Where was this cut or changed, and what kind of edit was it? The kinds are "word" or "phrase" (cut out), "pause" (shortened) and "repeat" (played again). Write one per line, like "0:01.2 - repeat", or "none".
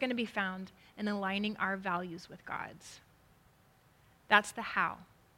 none